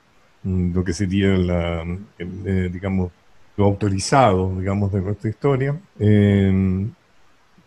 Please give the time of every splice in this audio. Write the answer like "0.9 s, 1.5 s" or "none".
1.4 s, 3.6 s, 5.9 s